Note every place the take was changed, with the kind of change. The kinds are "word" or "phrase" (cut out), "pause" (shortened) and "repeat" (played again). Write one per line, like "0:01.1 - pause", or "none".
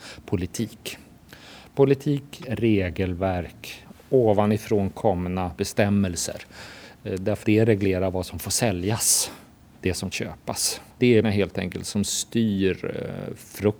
0:02.4 - word
0:07.4 - word
0:09.8 - phrase
0:10.1 - word
0:10.9 - pause
0:11.2 - word